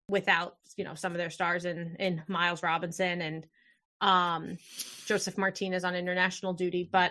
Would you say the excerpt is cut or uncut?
uncut